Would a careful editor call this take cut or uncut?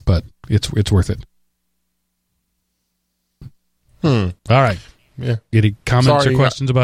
cut